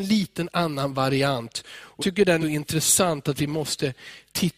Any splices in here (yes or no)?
yes